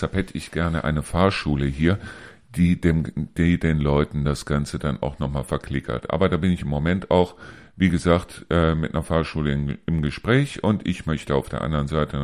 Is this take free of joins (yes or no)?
yes